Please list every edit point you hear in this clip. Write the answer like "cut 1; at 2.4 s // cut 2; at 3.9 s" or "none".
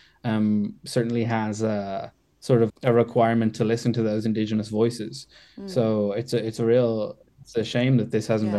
cut 1; at 2.7 s